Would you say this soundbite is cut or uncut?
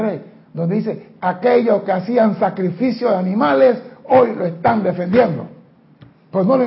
uncut